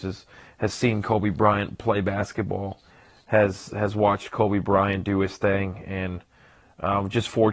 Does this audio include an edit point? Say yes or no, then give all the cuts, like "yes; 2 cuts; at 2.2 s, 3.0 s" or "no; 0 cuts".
no; 0 cuts